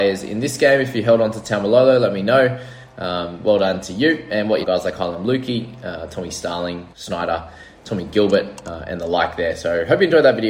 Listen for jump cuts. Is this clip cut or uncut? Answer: cut